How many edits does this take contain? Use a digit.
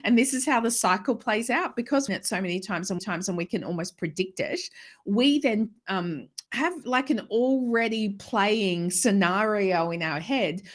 3